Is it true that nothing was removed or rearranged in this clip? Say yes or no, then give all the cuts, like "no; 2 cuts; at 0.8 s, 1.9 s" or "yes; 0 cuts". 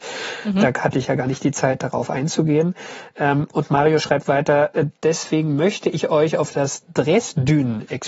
no; 1 cut; at 5.0 s